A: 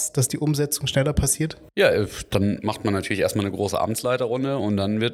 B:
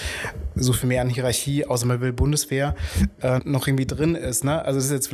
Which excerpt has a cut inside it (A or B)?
B